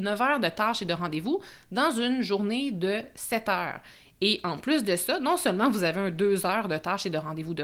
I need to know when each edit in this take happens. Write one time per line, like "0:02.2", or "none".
none